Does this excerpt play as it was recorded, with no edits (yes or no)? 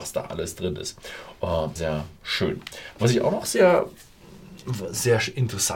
no